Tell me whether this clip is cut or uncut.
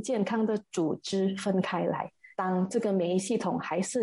cut